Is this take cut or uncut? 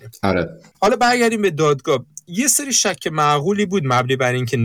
uncut